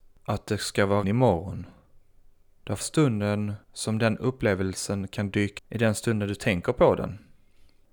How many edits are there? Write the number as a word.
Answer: four